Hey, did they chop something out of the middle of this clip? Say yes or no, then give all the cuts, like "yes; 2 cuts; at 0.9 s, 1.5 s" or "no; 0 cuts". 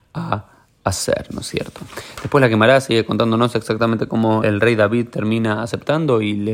yes; 1 cut; at 4.4 s